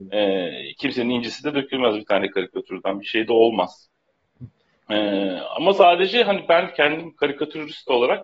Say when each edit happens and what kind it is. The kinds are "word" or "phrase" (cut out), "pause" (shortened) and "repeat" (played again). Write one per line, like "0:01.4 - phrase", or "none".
none